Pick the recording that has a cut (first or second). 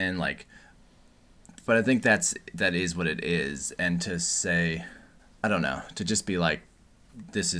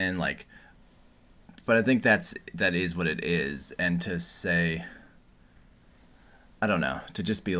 first